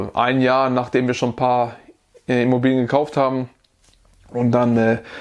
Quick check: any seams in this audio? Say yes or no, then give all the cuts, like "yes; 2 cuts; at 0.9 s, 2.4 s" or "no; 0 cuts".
no; 0 cuts